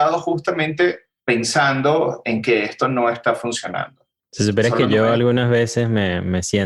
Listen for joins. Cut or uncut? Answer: uncut